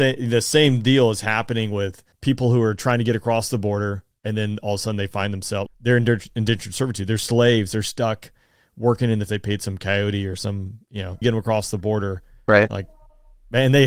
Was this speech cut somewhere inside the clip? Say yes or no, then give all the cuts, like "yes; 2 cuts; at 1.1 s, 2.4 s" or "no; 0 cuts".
yes; 4 cuts; at 2.1 s, 5.7 s, 9.3 s, 11.2 s